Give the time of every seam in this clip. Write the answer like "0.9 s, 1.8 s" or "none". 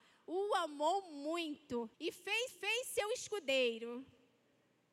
1.9 s, 2.5 s